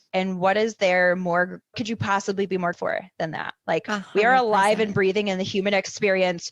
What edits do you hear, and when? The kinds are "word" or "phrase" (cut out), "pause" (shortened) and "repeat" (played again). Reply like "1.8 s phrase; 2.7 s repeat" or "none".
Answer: 1.7 s word; 2.7 s word

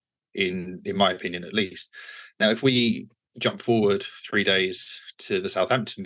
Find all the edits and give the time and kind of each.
none

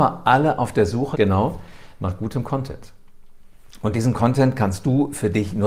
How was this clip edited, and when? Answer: 1.1 s word

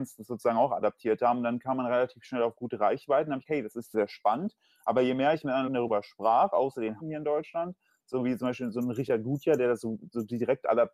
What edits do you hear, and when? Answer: 3.5 s word; 3.9 s word; 5.7 s word; 7.0 s word

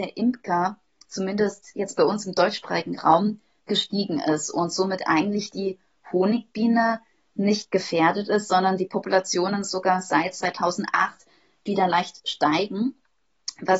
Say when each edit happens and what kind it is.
none

